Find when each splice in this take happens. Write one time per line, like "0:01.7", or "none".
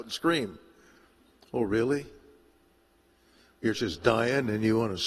0:03.7